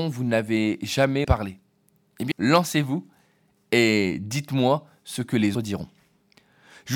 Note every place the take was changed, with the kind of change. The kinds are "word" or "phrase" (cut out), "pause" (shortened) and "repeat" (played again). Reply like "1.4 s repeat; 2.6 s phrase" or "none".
1.2 s word; 2.3 s word; 5.5 s word